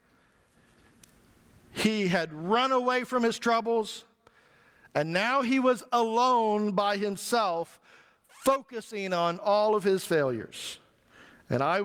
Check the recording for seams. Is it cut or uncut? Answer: uncut